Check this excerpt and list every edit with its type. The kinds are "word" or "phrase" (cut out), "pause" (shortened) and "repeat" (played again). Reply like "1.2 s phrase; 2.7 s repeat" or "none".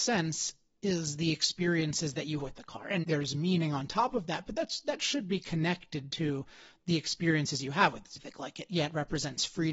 2.4 s word; 3.0 s word; 8.2 s word